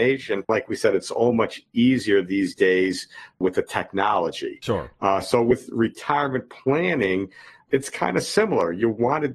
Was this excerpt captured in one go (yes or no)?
yes